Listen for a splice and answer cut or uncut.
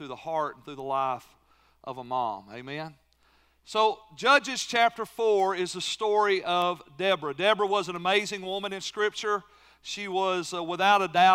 uncut